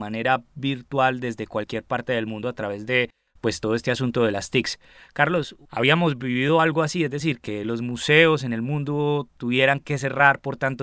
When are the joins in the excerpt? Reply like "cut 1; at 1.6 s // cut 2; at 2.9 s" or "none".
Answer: none